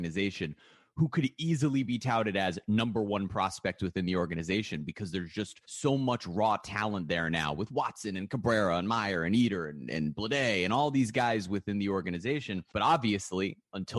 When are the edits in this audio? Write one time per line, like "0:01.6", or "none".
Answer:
0:05.6
0:12.7